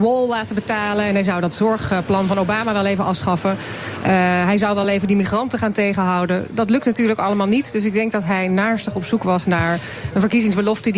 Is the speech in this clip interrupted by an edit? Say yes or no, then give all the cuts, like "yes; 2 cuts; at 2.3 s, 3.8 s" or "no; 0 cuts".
no; 0 cuts